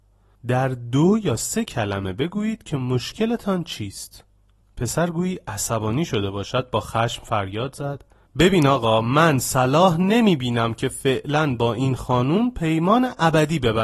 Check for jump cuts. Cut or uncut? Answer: uncut